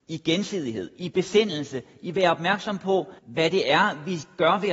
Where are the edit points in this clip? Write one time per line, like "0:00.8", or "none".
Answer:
0:03.2